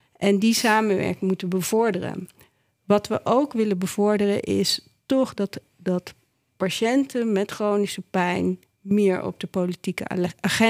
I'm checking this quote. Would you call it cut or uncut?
uncut